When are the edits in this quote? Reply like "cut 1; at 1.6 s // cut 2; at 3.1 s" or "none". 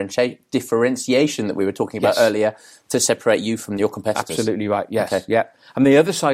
none